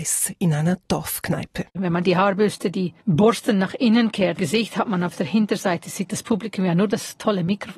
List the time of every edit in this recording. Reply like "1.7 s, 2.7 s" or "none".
1.7 s, 3.0 s, 4.4 s